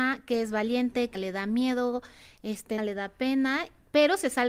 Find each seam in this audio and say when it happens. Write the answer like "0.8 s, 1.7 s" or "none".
1.1 s, 2.8 s